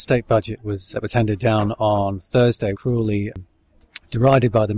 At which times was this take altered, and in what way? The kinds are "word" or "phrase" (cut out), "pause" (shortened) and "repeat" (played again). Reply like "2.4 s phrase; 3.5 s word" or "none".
0.9 s word; 2.7 s phrase